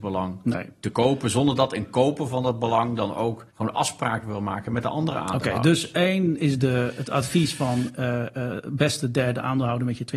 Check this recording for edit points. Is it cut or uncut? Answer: cut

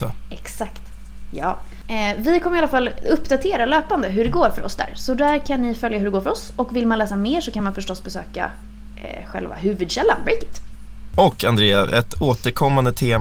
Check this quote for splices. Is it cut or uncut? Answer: uncut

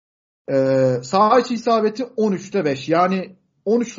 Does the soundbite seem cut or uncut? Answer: uncut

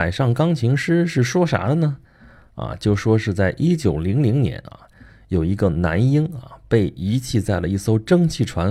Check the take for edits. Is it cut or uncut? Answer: uncut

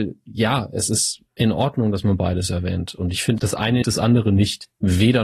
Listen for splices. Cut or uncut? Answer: cut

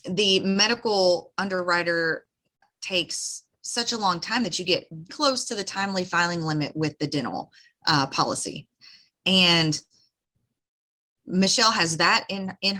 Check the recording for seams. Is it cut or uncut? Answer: cut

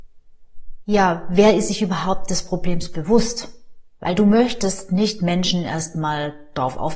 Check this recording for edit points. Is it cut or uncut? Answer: uncut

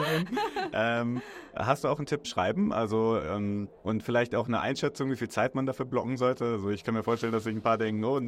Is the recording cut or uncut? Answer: cut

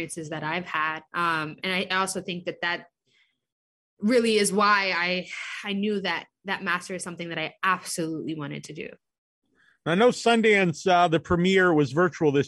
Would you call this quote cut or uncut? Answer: cut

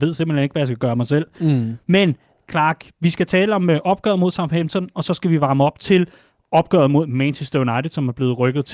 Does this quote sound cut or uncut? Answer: uncut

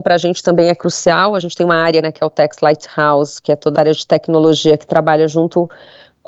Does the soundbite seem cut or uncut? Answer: cut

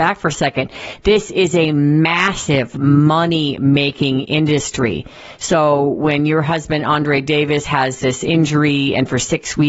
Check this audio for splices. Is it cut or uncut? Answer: uncut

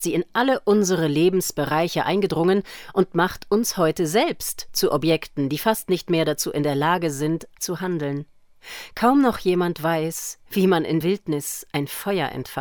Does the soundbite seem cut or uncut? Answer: cut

